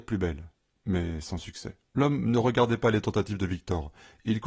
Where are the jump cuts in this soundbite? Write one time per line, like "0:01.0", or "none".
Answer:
0:01.9